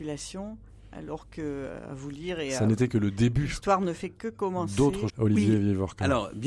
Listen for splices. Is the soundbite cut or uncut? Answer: cut